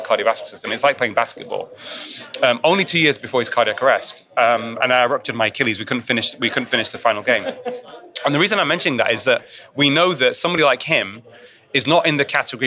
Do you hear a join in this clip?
no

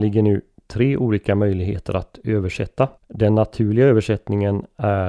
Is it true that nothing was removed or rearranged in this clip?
no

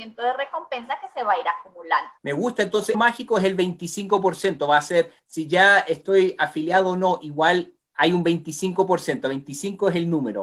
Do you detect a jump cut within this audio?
yes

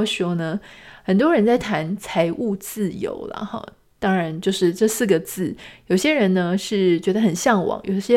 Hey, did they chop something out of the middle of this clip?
no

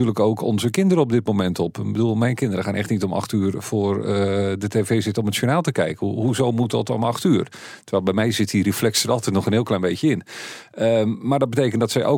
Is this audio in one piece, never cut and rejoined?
yes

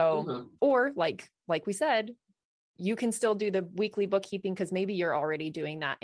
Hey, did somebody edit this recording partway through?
no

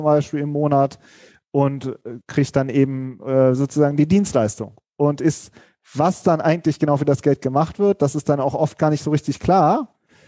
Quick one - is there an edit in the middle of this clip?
no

